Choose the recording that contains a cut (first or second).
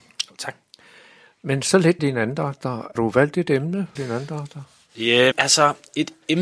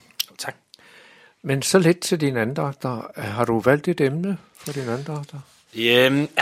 first